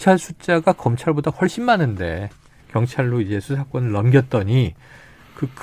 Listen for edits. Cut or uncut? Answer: uncut